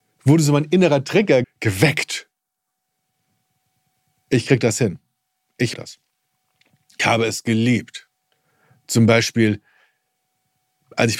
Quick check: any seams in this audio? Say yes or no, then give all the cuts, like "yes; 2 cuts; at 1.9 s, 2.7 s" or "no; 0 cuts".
yes; 3 cuts; at 1.4 s, 5.7 s, 7.0 s